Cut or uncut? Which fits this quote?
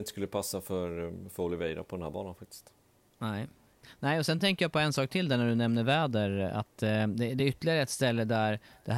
uncut